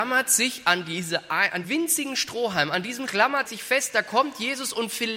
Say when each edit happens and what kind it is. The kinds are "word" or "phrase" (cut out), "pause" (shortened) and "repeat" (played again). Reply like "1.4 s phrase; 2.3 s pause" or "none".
1.6 s word; 3.1 s word; 3.5 s word